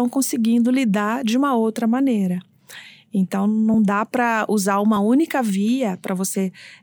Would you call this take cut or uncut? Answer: uncut